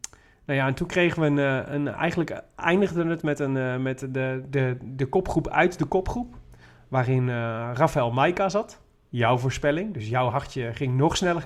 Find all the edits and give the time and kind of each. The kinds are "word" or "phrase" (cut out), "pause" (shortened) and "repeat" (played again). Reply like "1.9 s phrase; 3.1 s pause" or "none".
none